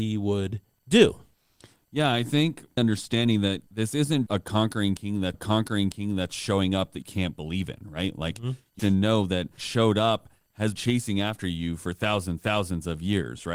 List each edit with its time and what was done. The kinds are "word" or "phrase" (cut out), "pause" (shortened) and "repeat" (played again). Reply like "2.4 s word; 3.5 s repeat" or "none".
2.8 s word; 3.7 s pause; 4.3 s word; 5.3 s repeat; 7.0 s word; 8.8 s word; 9.6 s phrase; 10.8 s word; 12.4 s repeat